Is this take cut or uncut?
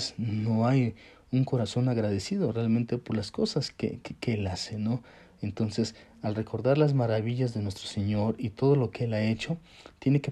uncut